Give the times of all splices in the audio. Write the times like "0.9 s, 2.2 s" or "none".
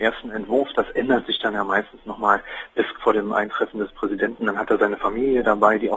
3.0 s